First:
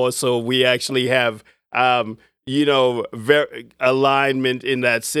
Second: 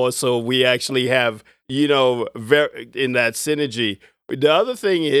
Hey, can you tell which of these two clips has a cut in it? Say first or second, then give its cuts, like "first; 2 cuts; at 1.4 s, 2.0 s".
second; 2 cuts; at 1.6 s, 2.9 s